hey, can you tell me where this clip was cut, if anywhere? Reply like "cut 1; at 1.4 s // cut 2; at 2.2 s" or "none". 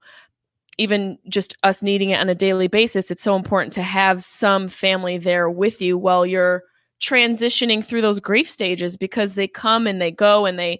none